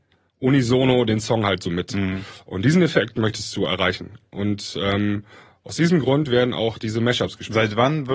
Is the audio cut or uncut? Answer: uncut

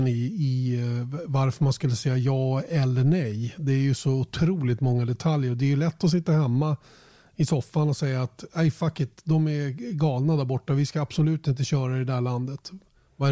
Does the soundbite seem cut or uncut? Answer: uncut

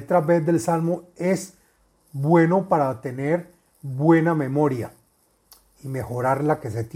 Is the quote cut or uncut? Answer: uncut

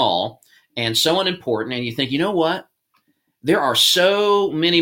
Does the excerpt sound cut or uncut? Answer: uncut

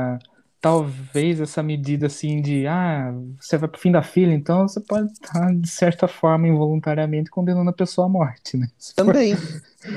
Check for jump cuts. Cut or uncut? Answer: uncut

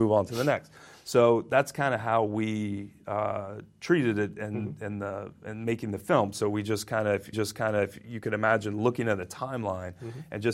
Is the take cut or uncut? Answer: cut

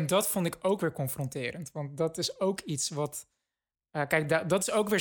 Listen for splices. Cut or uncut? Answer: uncut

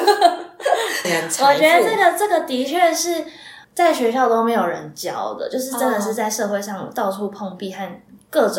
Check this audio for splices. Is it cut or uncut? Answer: cut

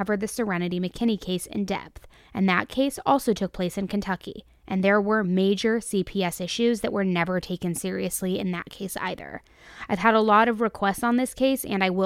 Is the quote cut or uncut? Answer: uncut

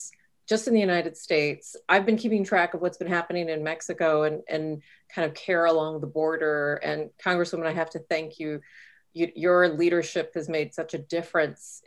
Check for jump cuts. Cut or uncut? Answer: uncut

